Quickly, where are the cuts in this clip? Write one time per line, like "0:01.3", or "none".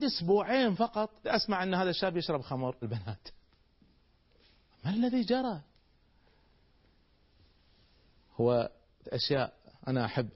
0:01.2
0:02.8
0:09.0